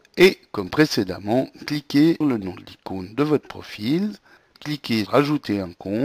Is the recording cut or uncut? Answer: cut